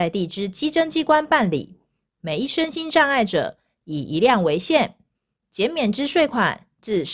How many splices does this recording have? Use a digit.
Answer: 0